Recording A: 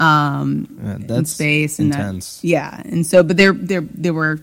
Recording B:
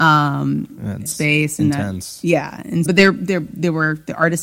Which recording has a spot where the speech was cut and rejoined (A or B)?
B